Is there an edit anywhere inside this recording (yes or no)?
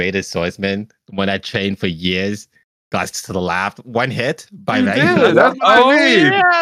no